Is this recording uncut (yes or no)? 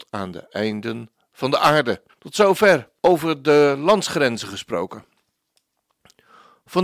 no